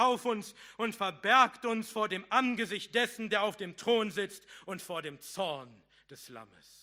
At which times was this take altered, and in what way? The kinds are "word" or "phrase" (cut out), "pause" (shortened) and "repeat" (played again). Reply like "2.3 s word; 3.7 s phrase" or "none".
none